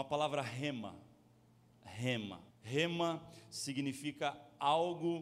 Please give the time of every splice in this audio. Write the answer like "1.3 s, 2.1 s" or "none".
2.5 s

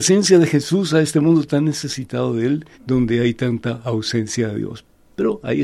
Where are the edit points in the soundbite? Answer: 2.7 s

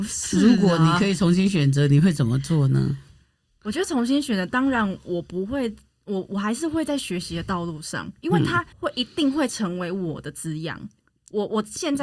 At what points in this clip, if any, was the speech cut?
8.7 s

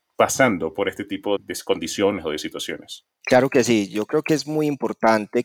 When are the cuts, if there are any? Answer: 1.4 s

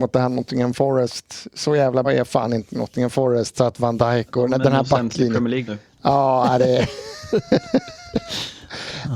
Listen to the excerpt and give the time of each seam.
2.0 s, 5.6 s

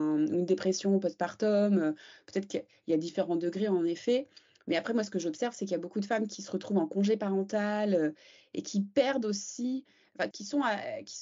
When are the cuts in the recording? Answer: 10.3 s

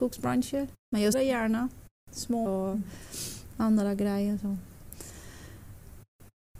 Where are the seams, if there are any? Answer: 1.1 s, 2.5 s

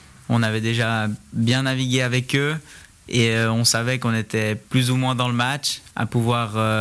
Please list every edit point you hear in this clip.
none

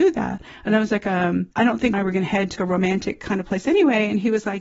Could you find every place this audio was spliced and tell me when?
1.5 s, 1.9 s, 2.6 s

